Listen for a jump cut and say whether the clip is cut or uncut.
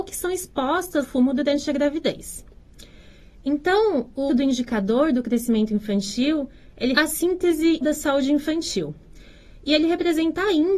cut